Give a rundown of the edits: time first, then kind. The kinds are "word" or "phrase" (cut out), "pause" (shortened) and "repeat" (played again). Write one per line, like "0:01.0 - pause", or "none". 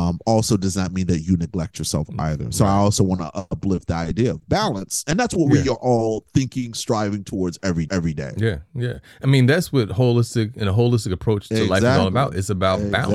0:07.9 - repeat